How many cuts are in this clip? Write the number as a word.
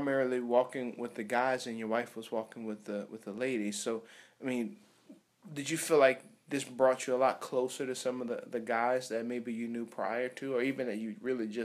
one